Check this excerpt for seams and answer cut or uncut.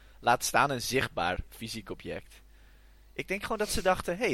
uncut